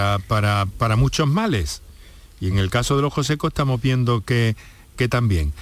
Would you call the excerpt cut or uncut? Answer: uncut